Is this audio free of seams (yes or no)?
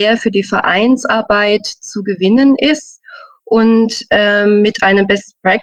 yes